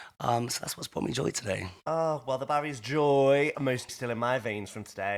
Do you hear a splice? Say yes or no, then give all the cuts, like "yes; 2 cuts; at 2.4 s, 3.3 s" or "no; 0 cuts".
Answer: yes; 3 cuts; at 1.8 s, 3.5 s, 3.9 s